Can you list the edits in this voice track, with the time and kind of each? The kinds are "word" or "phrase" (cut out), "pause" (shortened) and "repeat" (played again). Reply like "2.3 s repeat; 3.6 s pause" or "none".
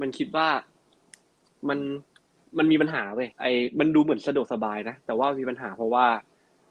2.3 s pause; 3.3 s pause